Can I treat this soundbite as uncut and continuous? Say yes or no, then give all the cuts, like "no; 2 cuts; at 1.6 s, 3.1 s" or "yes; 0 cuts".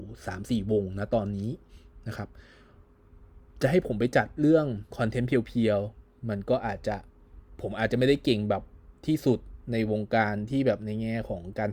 no; 2 cuts; at 4.9 s, 9.6 s